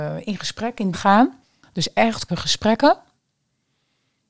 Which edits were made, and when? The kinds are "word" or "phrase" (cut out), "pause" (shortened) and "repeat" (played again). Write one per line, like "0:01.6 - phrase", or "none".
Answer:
0:00.9 - word
0:01.4 - pause
0:02.3 - word